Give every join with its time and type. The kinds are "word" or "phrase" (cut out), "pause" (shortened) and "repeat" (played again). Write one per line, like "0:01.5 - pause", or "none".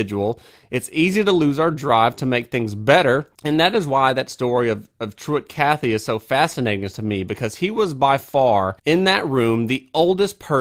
0:03.3 - pause
0:08.8 - pause